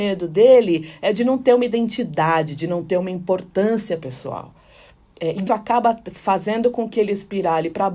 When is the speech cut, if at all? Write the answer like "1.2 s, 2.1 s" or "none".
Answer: 5.5 s